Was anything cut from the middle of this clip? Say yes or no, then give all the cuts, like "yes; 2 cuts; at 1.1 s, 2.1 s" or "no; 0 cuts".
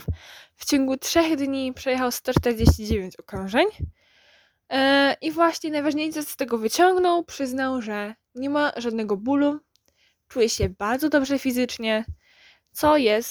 no; 0 cuts